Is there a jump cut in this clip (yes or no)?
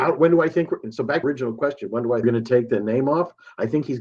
yes